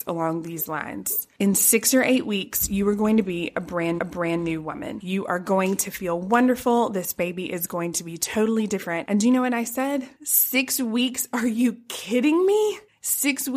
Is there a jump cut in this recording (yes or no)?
yes